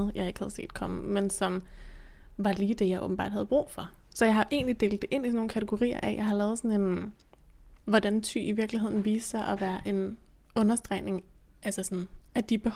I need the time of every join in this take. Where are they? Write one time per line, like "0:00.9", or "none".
0:07.8